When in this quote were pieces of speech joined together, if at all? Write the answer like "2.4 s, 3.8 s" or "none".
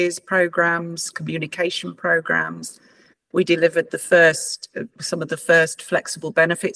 none